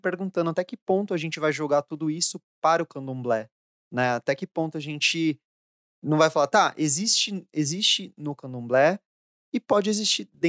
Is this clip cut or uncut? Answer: uncut